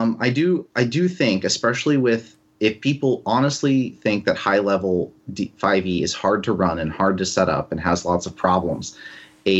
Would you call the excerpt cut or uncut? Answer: uncut